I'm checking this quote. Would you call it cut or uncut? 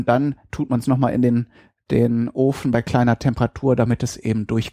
uncut